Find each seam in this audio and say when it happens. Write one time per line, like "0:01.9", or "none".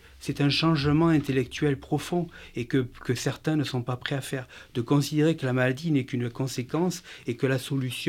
none